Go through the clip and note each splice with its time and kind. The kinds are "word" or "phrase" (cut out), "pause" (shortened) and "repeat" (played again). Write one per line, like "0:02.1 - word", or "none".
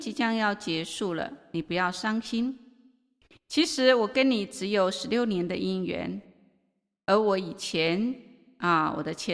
none

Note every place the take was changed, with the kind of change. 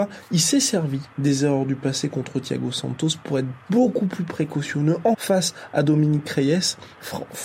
0:05.1 - word

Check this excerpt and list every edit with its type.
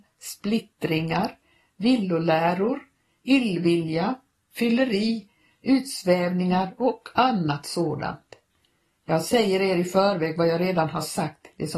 none

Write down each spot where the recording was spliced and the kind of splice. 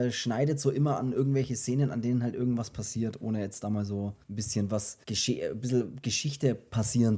0:04.2 - pause
0:05.0 - pause

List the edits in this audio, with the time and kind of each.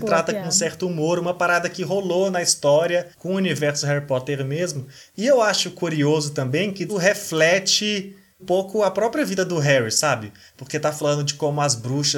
0:03.1 - pause
0:06.9 - phrase
0:08.4 - word

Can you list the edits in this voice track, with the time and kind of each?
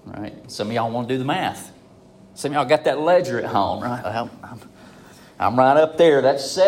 none

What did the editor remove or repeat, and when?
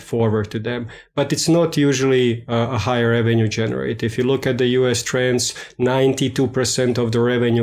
none

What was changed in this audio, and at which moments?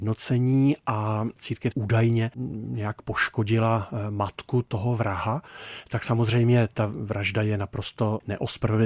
0:01.7 - word

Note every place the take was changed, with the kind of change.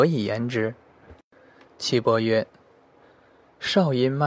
none

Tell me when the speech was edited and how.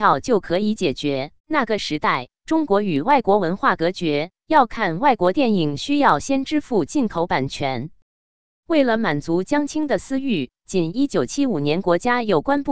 0:01.4 - pause

